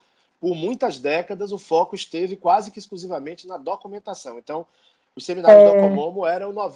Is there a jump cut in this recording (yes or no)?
no